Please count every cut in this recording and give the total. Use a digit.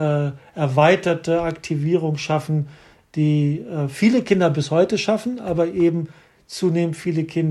0